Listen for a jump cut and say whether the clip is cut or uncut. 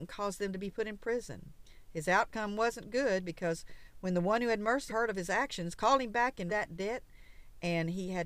cut